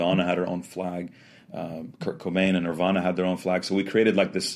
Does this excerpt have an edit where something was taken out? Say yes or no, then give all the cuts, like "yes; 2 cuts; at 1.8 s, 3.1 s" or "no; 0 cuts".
no; 0 cuts